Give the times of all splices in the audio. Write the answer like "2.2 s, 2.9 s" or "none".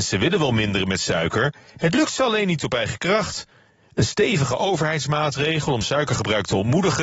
none

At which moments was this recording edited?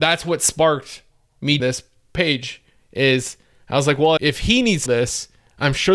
1.6 s, 4.2 s, 4.9 s

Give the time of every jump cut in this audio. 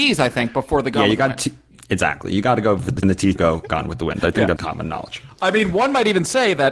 3.0 s, 3.4 s, 4.6 s

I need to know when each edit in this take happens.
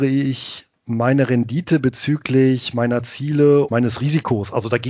3.7 s

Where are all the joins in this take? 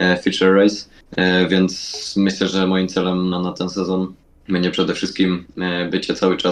1.0 s, 3.3 s, 4.2 s

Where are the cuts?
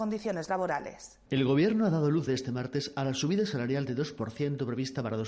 1.3 s, 2.3 s

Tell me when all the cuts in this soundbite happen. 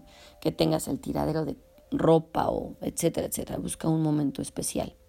none

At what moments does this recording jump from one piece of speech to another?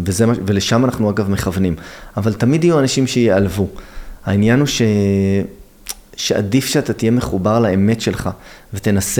none

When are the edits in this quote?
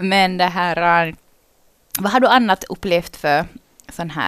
none

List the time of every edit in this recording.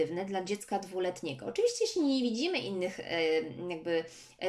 none

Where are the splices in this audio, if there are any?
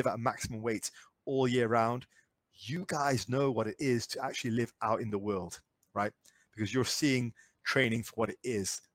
none

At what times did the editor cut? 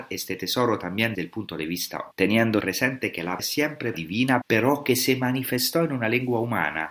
1.1 s, 2.1 s, 2.6 s, 3.4 s, 3.9 s, 4.4 s

